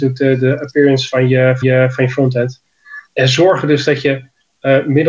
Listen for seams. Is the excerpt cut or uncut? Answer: cut